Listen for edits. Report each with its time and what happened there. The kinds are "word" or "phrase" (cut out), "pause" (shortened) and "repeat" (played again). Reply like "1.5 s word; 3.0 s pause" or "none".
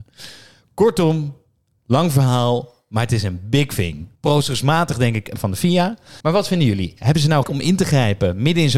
4.2 s pause; 5.4 s phrase; 6.2 s pause; 7.4 s word